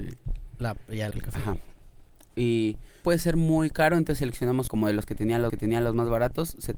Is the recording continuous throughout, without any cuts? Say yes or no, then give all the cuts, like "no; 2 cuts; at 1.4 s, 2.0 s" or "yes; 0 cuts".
no; 4 cuts; at 1.1 s, 3.0 s, 4.7 s, 5.5 s